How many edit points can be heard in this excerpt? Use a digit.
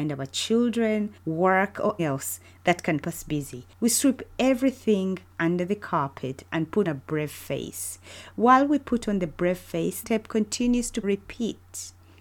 7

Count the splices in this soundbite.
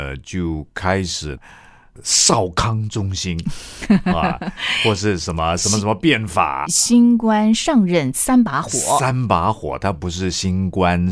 1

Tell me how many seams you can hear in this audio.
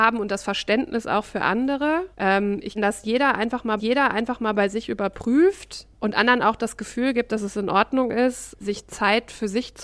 5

